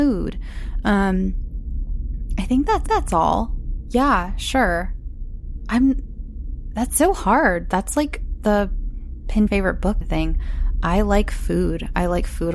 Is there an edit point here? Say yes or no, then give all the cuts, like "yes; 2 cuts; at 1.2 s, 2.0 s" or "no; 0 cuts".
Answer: yes; 3 cuts; at 2.9 s, 9.5 s, 10.0 s